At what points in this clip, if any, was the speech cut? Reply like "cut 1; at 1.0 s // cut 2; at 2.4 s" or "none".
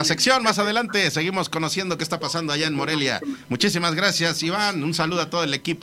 none

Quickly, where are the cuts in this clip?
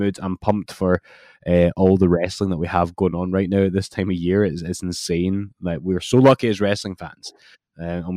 none

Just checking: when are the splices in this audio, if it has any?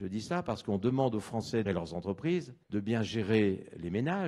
cut 1; at 1.7 s // cut 2; at 2.6 s

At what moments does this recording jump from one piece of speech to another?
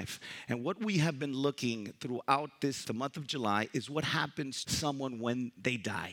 cut 1; at 2.8 s // cut 2; at 4.6 s

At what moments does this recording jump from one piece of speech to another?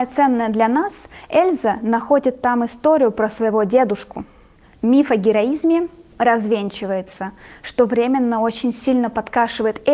none

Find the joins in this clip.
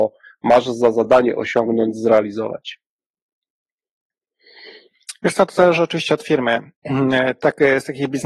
none

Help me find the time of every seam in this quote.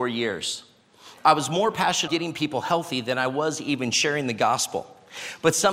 cut 1; at 2.1 s

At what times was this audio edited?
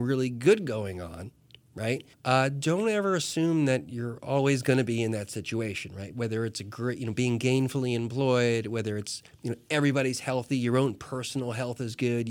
cut 1; at 2.1 s

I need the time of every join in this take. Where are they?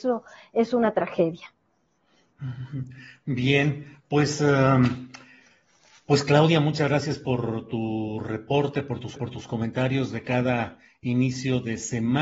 cut 1; at 9.2 s

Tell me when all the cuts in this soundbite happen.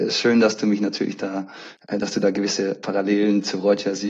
none

